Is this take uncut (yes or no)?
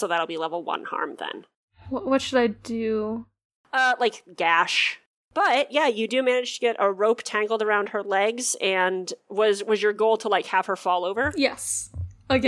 yes